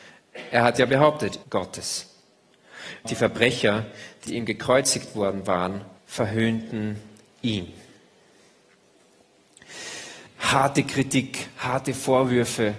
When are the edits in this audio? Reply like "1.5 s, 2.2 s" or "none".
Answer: 1.4 s, 3.0 s, 4.3 s, 6.0 s, 10.3 s

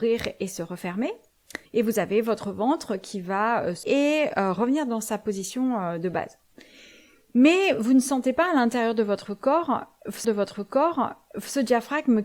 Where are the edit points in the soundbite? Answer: 1.7 s, 3.8 s, 10.2 s

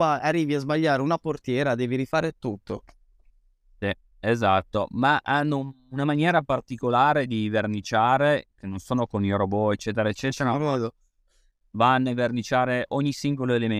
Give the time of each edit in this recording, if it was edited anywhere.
none

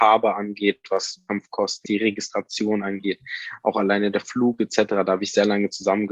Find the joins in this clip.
1.8 s

